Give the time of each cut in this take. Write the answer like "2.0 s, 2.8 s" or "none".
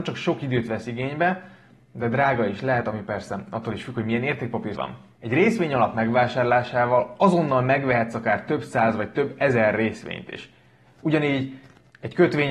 4.8 s